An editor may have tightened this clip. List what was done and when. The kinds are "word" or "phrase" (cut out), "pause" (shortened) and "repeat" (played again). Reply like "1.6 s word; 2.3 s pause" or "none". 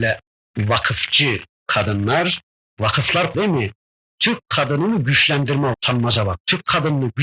3.3 s word; 5.7 s word